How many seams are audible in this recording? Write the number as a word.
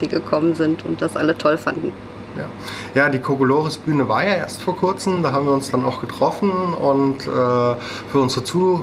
zero